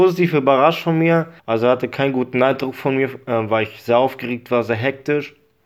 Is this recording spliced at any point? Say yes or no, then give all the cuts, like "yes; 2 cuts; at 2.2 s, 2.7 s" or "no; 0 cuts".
yes; 1 cut; at 1.4 s